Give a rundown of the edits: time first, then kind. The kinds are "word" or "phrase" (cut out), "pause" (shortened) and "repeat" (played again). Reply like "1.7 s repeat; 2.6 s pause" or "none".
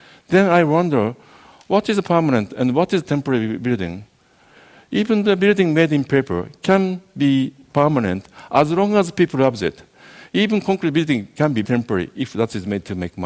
11.6 s word